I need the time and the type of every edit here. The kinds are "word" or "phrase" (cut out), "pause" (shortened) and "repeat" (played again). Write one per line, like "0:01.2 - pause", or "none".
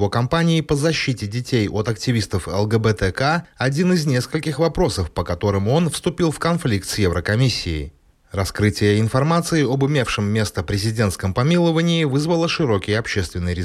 none